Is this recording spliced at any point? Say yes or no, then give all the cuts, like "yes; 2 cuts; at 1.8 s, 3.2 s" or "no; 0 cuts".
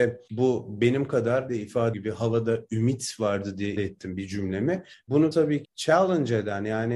yes; 5 cuts; at 1.5 s, 1.9 s, 3.8 s, 5.3 s, 5.6 s